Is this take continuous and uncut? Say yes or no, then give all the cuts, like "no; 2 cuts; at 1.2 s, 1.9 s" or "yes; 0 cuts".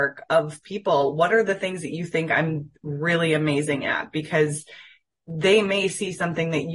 yes; 0 cuts